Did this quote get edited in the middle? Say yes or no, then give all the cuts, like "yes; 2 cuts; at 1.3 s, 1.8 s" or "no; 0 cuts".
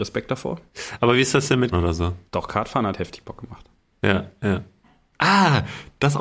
yes; 1 cut; at 1.7 s